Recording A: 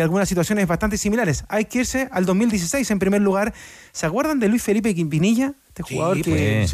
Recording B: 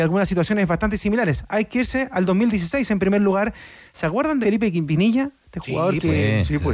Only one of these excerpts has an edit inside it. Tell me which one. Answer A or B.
B